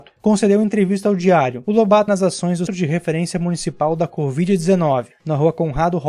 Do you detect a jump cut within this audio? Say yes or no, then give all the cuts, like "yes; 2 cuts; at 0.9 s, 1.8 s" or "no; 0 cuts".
yes; 2 cuts; at 2.1 s, 2.7 s